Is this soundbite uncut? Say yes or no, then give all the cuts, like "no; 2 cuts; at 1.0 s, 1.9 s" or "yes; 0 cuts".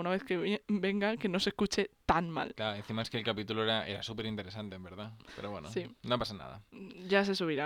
yes; 0 cuts